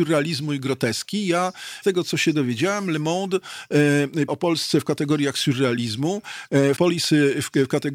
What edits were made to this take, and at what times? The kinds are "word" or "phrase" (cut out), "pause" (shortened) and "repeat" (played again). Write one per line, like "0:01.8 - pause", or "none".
0:01.8 - word
0:04.3 - word
0:06.8 - word